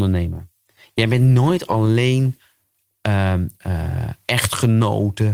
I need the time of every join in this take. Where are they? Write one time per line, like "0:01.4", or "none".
none